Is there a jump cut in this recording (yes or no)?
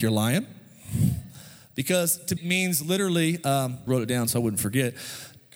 yes